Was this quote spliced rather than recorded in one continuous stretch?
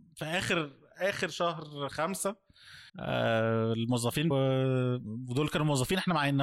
yes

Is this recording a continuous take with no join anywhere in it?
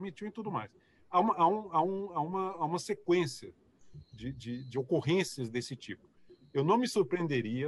yes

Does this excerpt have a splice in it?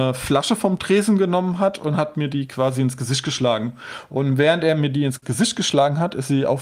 no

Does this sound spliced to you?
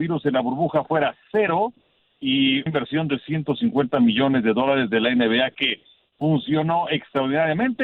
yes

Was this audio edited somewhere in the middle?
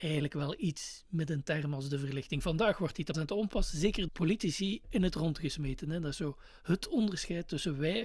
yes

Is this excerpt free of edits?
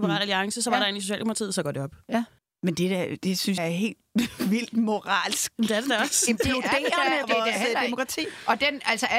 no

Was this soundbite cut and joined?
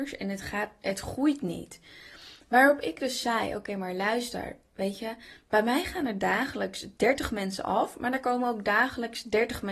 no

